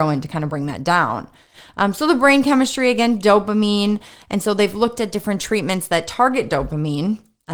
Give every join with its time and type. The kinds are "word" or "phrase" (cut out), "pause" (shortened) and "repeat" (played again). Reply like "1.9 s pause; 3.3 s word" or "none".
none